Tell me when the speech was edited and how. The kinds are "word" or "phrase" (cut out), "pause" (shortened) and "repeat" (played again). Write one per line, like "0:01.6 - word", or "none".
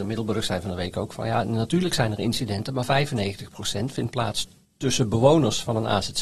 none

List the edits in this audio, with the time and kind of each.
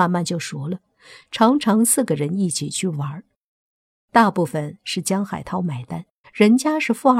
0:06.2 - pause

